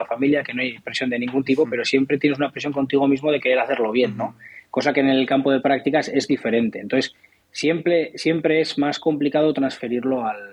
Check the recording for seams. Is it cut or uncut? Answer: uncut